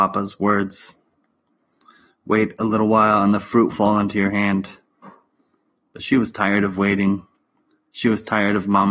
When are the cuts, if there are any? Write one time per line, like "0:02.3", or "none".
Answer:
0:03.7

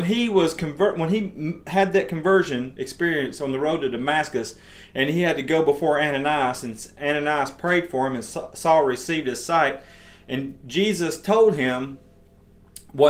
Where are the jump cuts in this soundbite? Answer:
none

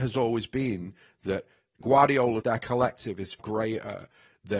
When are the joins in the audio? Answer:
0:01.8
0:02.4
0:03.4

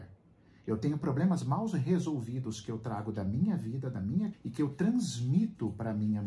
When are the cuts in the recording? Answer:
0:04.3

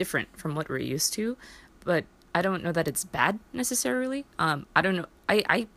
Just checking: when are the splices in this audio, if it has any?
none

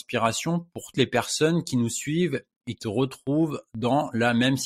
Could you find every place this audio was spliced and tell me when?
0:00.9
0:02.8

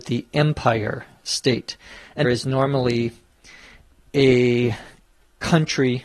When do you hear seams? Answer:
0:02.2

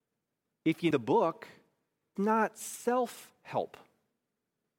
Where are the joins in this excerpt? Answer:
0:00.9
0:02.2

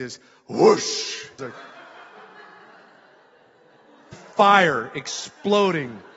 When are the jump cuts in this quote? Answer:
0:01.4
0:04.1

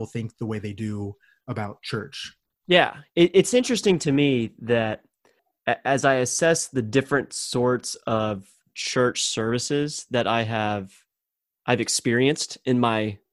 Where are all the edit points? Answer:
none

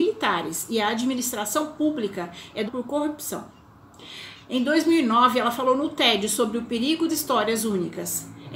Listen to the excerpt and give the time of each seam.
0:02.6
0:07.1

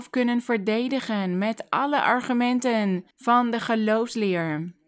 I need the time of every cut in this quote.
0:03.1

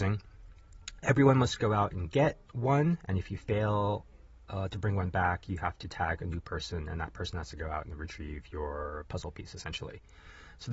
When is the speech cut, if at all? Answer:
0:02.5

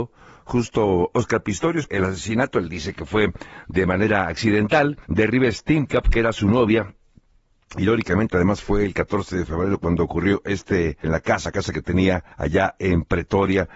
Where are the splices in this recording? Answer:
0:01.9
0:05.0
0:11.0
0:11.5
0:12.3

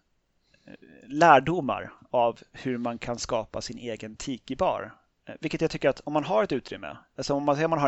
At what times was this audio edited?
none

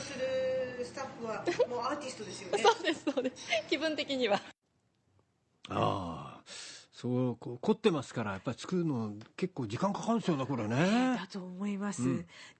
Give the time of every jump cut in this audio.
none

